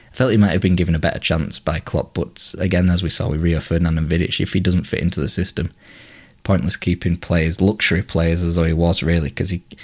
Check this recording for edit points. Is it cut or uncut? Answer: uncut